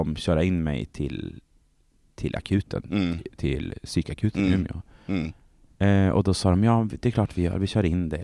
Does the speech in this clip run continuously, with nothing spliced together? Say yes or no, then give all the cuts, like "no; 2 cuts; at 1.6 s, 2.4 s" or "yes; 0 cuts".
yes; 0 cuts